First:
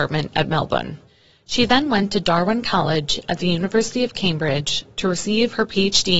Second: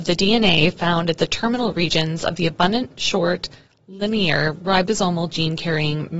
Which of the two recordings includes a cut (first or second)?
first